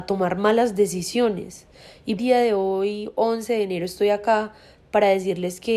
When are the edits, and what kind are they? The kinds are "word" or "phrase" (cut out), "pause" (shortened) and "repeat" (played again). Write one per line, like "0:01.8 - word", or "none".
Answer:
0:02.2 - phrase